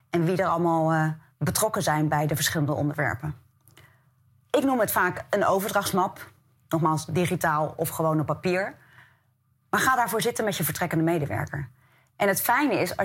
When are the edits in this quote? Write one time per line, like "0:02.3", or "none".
none

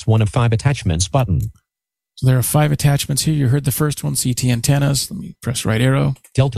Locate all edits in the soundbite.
none

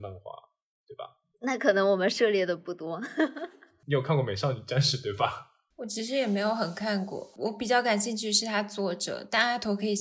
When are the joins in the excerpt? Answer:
none

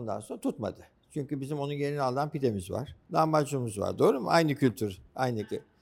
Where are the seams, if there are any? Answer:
0:03.0

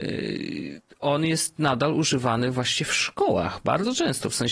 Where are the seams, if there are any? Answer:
none

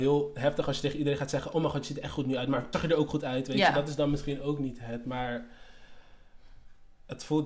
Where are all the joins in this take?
0:02.7

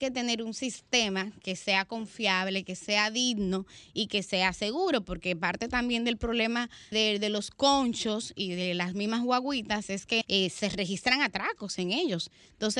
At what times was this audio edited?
0:06.9
0:10.2

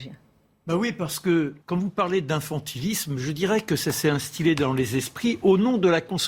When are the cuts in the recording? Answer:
0:01.6

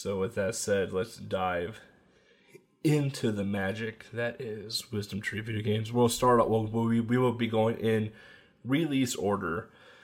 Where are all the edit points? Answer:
none

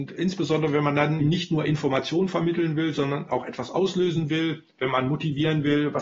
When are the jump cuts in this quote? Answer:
0:01.2

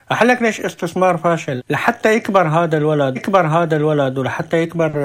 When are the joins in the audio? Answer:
0:01.6
0:03.2

